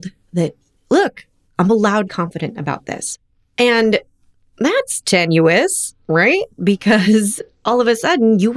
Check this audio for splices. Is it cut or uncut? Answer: cut